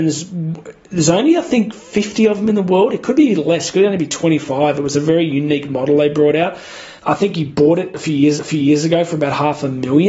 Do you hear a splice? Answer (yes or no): yes